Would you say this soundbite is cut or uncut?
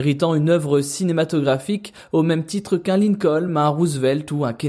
uncut